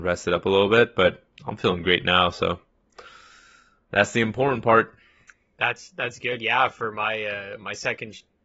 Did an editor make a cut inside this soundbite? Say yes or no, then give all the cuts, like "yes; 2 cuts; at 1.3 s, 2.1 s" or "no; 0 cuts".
no; 0 cuts